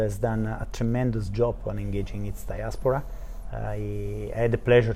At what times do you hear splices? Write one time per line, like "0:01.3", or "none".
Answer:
none